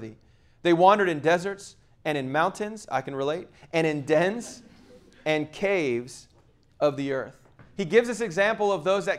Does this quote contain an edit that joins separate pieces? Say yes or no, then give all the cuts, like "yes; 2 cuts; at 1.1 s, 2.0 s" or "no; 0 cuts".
no; 0 cuts